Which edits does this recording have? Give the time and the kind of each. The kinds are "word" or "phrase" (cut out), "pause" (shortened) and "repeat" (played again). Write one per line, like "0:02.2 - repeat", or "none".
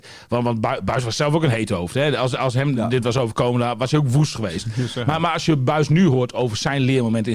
none